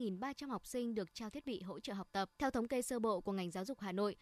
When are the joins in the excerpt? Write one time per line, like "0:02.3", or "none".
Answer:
0:02.4